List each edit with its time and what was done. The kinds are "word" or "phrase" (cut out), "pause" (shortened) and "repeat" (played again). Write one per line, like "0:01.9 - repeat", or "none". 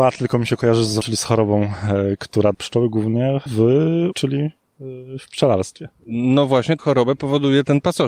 0:01.0 - word
0:02.5 - word
0:03.5 - word
0:04.1 - word
0:06.8 - word